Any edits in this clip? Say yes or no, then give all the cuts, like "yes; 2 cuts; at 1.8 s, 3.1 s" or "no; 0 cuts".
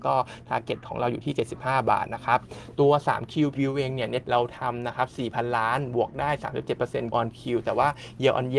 yes; 3 cuts; at 3.5 s, 4.2 s, 7.1 s